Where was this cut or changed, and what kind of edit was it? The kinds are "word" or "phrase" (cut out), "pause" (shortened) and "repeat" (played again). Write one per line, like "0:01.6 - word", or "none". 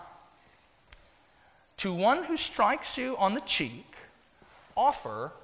none